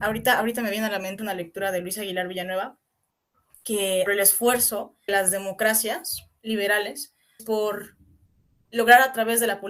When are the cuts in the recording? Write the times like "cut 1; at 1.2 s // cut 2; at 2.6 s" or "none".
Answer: cut 1; at 1.2 s // cut 2; at 4.1 s // cut 3; at 5.1 s // cut 4; at 7.4 s